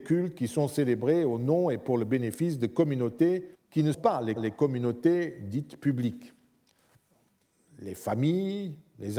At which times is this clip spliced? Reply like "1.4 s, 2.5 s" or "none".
3.5 s, 3.9 s, 4.4 s